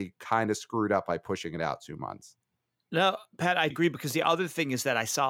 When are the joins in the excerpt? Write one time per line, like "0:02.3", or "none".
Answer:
0:03.7